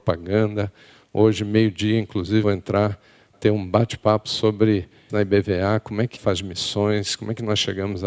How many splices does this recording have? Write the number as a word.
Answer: four